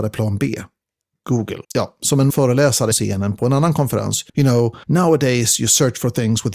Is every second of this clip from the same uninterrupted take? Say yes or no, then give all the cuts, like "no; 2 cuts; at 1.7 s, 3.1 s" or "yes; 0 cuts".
no; 5 cuts; at 1.6 s, 2.3 s, 2.9 s, 4.3 s, 4.8 s